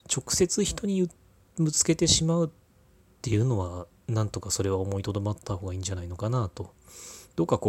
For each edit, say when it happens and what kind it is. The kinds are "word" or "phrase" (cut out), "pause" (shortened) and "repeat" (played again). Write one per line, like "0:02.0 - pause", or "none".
none